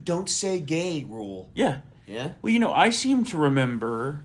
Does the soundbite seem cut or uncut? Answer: uncut